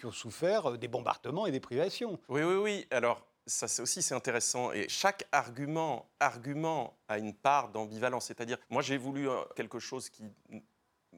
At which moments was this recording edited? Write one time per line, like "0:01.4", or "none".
0:02.2
0:06.2
0:08.6
0:09.5